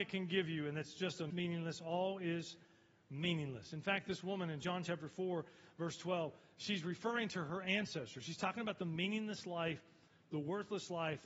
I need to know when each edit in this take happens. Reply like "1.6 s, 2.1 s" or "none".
1.3 s

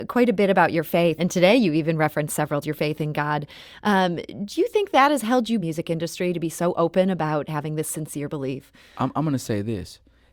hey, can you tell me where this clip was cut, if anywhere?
1.2 s, 2.6 s, 5.6 s

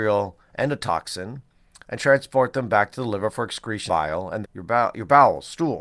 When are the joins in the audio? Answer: 3.9 s, 4.4 s

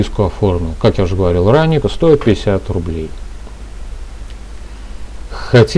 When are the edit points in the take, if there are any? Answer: 1.8 s

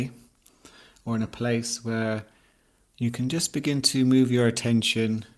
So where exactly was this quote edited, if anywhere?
none

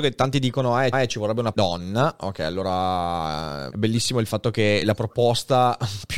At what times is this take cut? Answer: 0.9 s, 1.5 s, 3.7 s

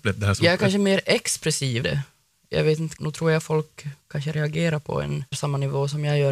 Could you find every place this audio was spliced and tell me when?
1.8 s, 3.0 s, 4.0 s, 5.3 s

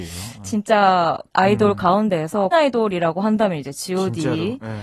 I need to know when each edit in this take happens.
1.3 s, 2.5 s

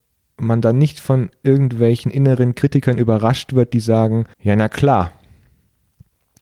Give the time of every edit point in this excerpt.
4.3 s

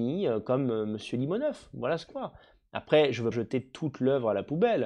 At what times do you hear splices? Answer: 2.1 s, 3.3 s

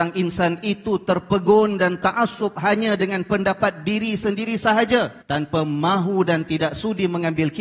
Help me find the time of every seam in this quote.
5.2 s

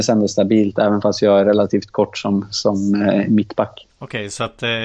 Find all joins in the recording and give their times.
none

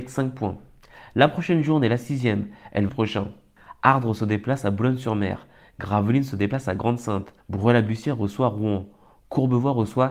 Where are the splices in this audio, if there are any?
2.9 s, 7.4 s

